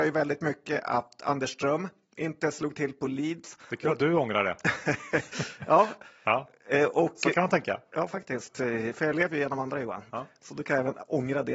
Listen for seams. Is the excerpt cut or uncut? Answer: uncut